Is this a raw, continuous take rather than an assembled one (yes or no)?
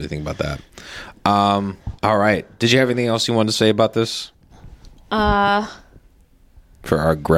no